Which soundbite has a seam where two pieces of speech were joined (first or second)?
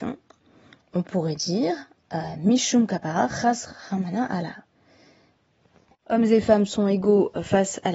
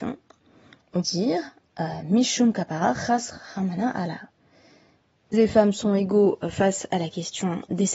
second